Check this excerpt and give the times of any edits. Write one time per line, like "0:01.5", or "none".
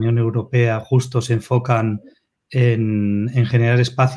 none